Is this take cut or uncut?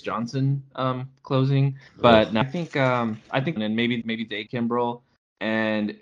cut